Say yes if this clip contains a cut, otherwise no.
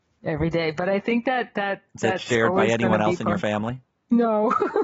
no